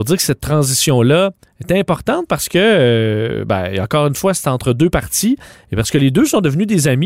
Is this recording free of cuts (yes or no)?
yes